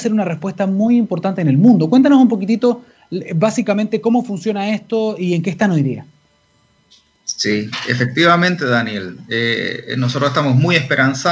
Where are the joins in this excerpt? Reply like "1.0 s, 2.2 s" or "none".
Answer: none